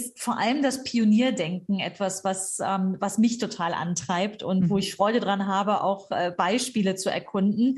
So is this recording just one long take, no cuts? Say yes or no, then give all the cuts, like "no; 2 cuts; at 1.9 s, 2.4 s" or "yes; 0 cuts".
yes; 0 cuts